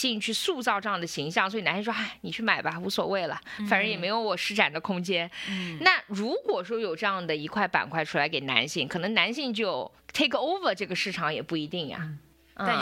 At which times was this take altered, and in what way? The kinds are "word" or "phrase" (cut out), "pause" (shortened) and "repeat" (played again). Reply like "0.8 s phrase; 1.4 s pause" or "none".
10.0 s pause